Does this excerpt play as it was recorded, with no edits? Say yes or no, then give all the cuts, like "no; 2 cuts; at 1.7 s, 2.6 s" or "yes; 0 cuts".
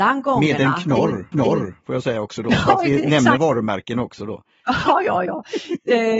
no; 2 cuts; at 1.3 s, 3.4 s